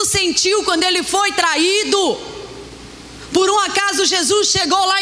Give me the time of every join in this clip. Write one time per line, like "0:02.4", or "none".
none